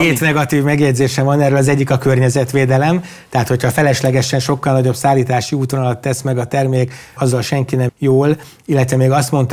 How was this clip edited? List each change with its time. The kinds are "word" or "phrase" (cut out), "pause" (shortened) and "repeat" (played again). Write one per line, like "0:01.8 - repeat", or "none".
0:07.2 - word
0:07.9 - word